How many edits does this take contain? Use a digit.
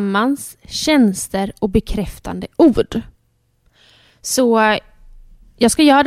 0